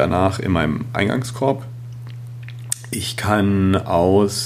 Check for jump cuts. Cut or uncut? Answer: uncut